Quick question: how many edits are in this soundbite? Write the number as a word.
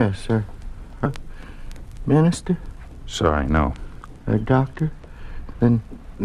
one